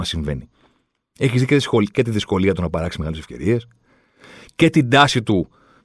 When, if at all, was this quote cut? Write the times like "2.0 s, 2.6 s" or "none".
none